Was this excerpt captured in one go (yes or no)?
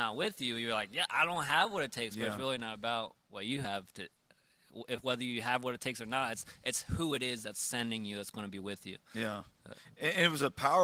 yes